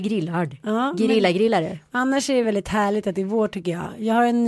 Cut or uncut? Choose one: uncut